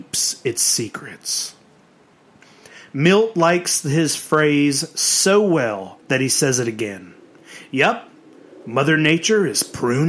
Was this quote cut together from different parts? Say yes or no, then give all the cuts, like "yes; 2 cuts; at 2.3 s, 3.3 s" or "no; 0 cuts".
yes; 1 cut; at 6.0 s